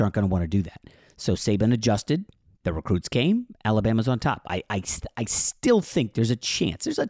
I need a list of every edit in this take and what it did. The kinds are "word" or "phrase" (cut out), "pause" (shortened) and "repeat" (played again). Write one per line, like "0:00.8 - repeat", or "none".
none

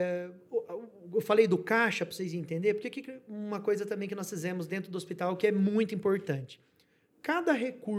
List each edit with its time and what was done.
none

